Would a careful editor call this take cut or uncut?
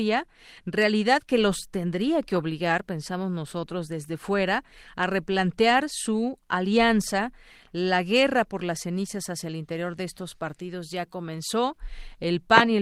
uncut